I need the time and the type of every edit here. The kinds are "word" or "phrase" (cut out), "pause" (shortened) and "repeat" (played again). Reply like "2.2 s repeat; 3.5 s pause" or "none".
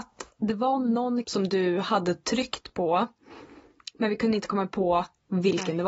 1.2 s word